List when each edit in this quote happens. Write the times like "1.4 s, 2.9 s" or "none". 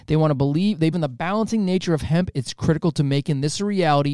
0.9 s